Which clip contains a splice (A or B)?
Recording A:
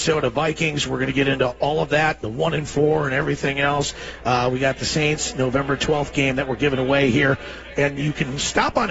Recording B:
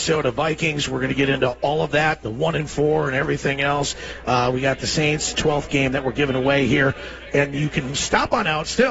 B